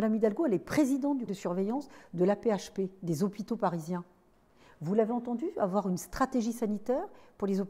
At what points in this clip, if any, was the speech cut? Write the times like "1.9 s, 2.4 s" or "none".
1.3 s

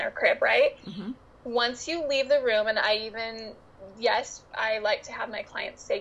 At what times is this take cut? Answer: none

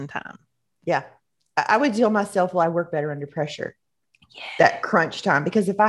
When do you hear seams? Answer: none

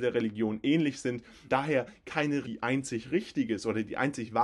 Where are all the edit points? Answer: 1.5 s, 2.4 s

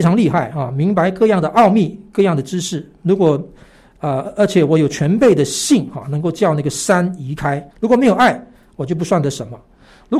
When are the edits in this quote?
7.7 s

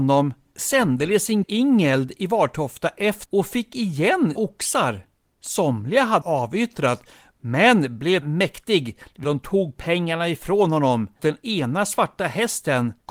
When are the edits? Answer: 1.4 s, 3.3 s, 4.4 s, 6.2 s, 8.2 s, 9.2 s, 11.2 s

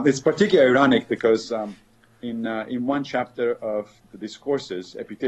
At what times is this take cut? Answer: none

